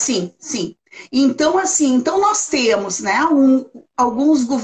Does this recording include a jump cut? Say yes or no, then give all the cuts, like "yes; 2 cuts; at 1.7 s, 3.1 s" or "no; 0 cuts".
no; 0 cuts